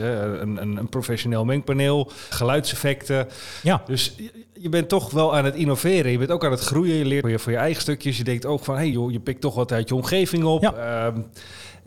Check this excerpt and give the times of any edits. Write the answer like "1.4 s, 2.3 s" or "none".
2.3 s, 7.2 s, 8.9 s